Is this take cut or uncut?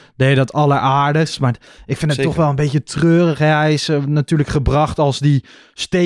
uncut